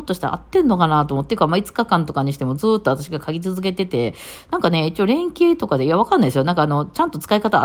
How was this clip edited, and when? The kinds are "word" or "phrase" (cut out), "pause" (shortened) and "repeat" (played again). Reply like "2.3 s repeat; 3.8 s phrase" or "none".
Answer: none